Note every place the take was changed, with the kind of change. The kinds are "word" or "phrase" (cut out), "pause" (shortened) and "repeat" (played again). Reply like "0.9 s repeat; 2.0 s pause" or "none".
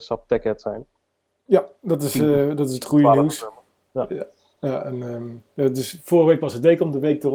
none